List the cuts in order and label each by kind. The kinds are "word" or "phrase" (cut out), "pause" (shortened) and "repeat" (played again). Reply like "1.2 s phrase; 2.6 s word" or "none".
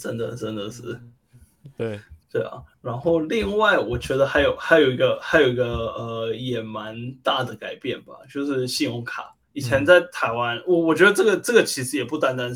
2.2 s pause; 2.7 s pause; 9.4 s pause

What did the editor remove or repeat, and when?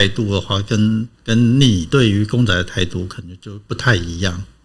1.1 s pause

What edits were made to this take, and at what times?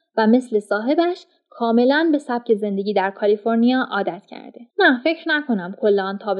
4.7 s pause

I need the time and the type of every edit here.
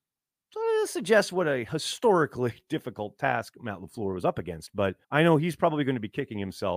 5.0 s pause

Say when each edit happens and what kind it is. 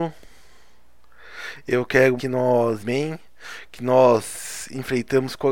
2.2 s word; 2.8 s word

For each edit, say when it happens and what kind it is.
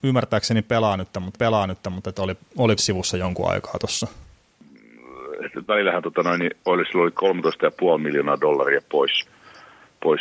1.3 s repeat; 2.8 s word

